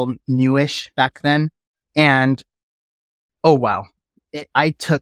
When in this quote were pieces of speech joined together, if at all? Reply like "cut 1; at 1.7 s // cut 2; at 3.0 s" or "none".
none